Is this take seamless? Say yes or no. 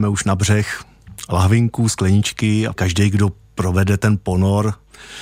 no